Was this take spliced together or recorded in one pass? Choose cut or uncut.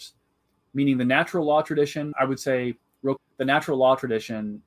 cut